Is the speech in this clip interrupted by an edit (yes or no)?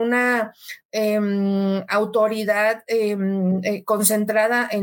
no